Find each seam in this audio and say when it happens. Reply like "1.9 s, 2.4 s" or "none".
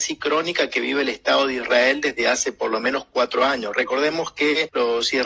none